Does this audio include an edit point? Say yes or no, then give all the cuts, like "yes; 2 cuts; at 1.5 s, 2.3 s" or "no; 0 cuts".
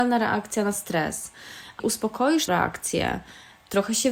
yes; 2 cuts; at 1.8 s, 2.5 s